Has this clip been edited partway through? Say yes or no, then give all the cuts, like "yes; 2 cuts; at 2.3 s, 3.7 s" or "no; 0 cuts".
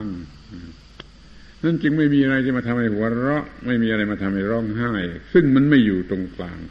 yes; 1 cut; at 1.5 s